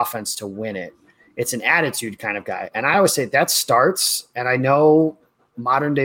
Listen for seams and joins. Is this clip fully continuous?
yes; 0 cuts

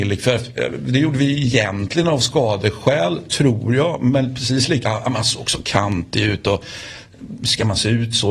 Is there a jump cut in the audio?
yes; 1 cut; at 4.8 s

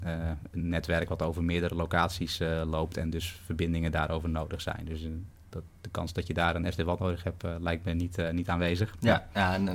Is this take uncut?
yes; 0 cuts

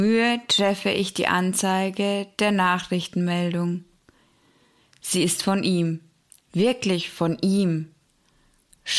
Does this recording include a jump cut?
no; 0 cuts

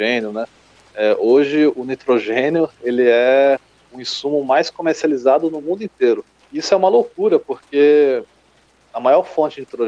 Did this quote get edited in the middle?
no; 0 cuts

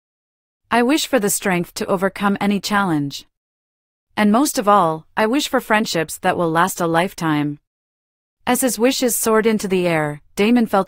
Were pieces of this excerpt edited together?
no; 0 cuts

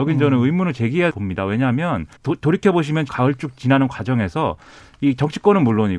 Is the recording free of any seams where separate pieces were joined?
no; 3 cuts; at 1.1 s, 2.2 s, 3.1 s

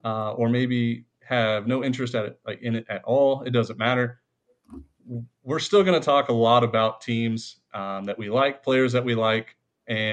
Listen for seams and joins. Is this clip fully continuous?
yes; 0 cuts

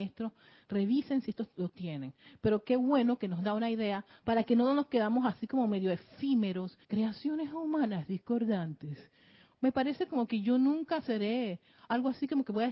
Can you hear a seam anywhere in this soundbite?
yes; 1 cut; at 6.8 s

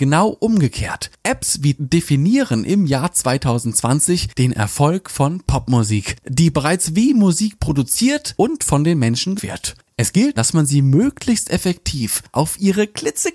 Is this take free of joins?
no; 5 cuts; at 1.8 s, 6.5 s, 8.3 s, 9.4 s, 10.4 s

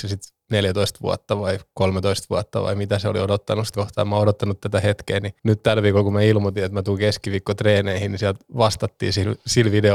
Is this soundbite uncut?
no; 2 cuts; at 3.7 s, 5.4 s

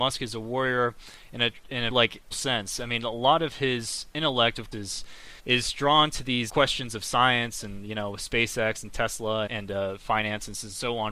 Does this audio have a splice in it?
yes; 6 cuts; at 1.9 s, 2.3 s, 4.7 s, 5.4 s, 6.5 s, 9.5 s

